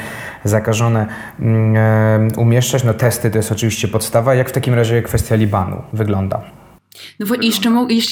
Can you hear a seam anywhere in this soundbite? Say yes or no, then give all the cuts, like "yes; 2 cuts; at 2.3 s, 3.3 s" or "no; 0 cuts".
yes; 1 cut; at 6.7 s